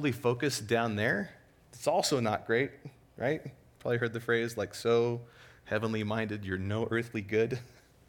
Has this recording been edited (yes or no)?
no